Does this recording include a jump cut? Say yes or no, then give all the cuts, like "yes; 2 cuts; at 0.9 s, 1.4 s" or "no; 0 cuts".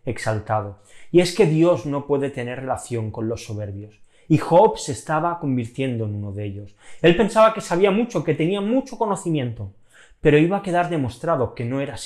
no; 0 cuts